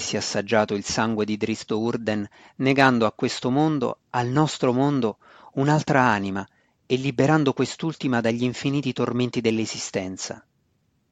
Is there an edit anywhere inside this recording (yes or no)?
no